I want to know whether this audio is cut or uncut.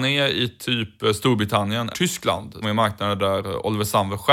cut